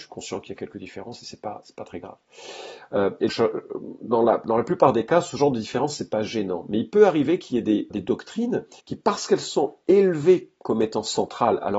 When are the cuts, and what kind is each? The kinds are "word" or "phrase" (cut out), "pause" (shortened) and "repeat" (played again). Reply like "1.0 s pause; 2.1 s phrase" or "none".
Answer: 3.3 s word; 7.9 s word; 8.8 s pause